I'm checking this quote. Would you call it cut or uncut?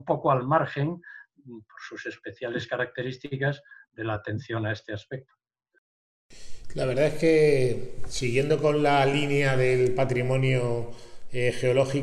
uncut